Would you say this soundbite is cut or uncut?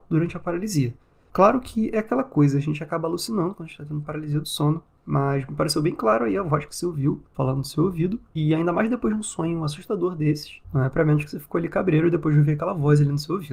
uncut